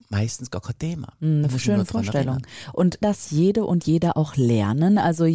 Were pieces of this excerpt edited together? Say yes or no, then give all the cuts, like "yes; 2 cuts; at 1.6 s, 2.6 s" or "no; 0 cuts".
yes; 1 cut; at 3.0 s